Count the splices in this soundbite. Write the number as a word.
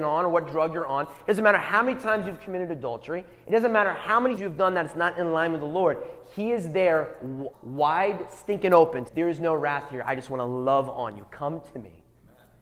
three